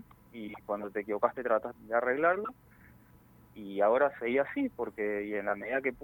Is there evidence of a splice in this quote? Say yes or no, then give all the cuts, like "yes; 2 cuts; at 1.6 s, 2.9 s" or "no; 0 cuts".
yes; 1 cut; at 1.8 s